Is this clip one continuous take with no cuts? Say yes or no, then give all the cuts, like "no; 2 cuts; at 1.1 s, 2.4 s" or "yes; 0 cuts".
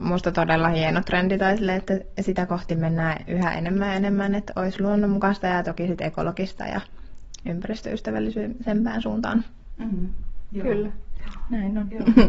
yes; 0 cuts